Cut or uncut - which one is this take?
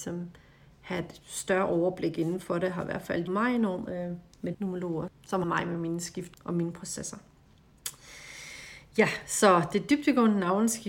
cut